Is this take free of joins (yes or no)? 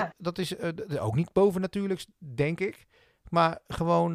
yes